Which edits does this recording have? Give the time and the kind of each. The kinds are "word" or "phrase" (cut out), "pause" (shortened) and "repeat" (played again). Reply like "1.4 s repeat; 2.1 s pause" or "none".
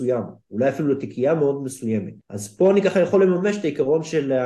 2.2 s pause